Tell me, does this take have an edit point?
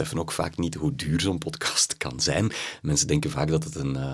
no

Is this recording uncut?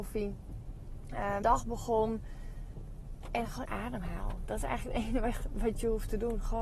no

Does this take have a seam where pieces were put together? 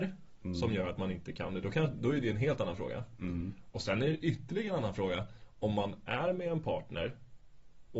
no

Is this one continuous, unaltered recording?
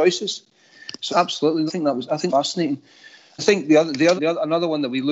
no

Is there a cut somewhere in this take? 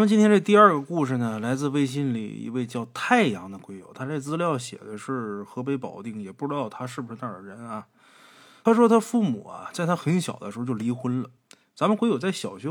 no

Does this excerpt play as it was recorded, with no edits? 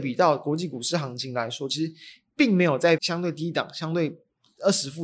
no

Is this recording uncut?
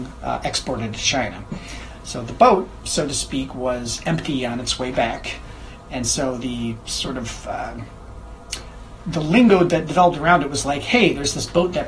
yes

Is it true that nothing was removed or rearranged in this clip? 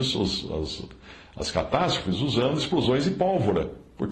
yes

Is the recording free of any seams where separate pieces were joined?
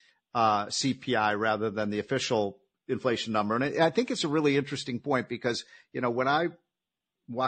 yes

